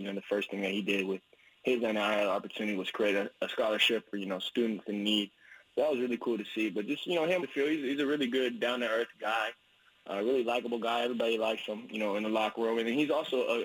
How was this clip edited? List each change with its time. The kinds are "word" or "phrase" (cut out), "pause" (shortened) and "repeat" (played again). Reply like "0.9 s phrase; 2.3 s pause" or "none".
7.4 s word